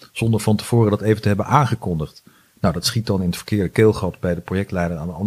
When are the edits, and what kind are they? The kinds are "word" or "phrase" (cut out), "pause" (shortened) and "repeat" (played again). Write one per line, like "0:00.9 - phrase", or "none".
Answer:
none